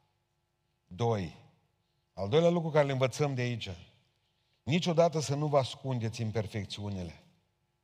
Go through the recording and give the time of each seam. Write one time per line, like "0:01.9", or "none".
none